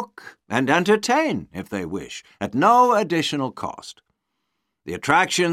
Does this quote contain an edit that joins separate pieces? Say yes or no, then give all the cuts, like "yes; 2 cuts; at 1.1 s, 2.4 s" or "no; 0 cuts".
no; 0 cuts